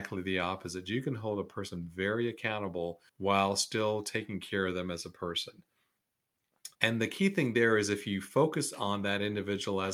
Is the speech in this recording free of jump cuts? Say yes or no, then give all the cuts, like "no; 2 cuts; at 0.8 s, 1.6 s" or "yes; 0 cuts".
no; 2 cuts; at 3.1 s, 6.7 s